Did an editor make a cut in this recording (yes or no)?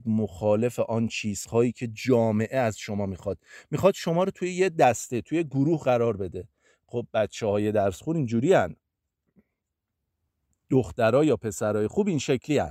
no